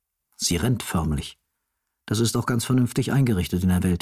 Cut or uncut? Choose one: uncut